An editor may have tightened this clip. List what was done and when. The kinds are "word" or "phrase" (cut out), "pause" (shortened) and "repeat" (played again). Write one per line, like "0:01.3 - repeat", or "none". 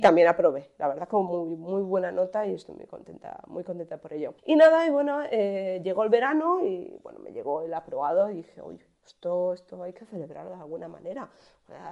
0:04.4 - pause